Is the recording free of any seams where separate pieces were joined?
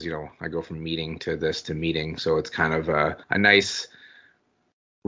no; 1 cut; at 3.2 s

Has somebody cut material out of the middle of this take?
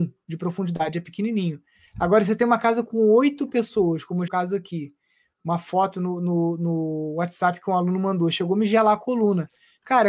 yes; 1 cut; at 4.3 s

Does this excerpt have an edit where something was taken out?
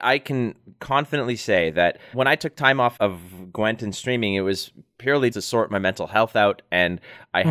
yes; 3 cuts; at 2.1 s, 3.0 s, 5.3 s

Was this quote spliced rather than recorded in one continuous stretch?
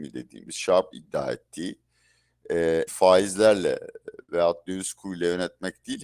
yes; 3 cuts; at 0.9 s, 2.9 s, 4.6 s

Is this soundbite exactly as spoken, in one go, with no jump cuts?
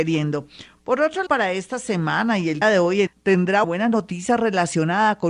no; 4 cuts; at 1.3 s, 2.6 s, 3.1 s, 3.6 s

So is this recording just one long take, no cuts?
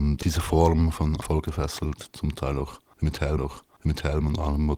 no; 2 cuts; at 1.2 s, 3.4 s

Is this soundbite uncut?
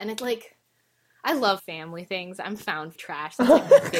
no; 2 cuts; at 1.6 s, 3.0 s

